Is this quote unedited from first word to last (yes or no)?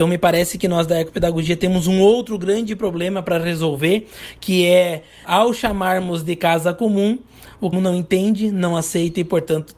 no